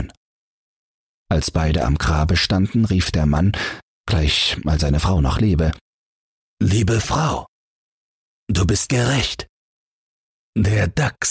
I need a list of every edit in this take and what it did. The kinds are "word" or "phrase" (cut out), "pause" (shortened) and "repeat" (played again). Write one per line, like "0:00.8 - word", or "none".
0:04.8 - word
0:08.9 - word